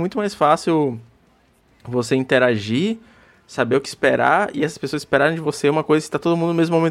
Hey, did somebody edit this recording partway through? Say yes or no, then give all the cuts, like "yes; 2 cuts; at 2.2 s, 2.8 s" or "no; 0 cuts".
no; 0 cuts